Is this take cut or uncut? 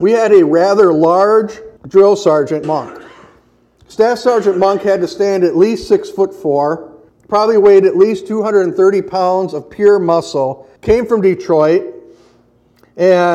cut